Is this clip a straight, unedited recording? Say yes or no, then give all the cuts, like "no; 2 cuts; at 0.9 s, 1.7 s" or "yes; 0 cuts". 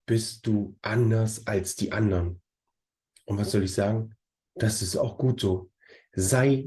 yes; 0 cuts